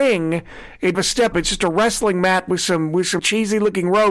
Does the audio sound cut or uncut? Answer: cut